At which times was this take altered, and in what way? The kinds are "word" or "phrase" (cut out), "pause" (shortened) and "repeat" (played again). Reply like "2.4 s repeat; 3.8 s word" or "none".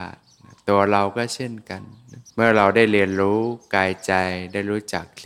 2.3 s pause